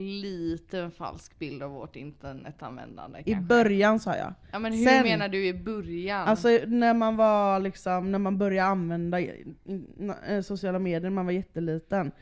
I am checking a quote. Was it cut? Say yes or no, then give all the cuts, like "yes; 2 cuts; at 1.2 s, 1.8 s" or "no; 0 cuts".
yes; 1 cut; at 4.4 s